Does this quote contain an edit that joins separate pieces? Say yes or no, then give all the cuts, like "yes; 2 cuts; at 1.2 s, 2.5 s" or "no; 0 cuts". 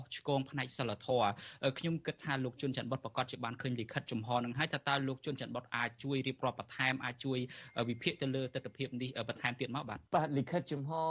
yes; 1 cut; at 10.1 s